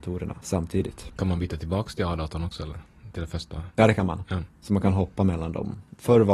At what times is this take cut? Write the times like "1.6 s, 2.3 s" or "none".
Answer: 3.7 s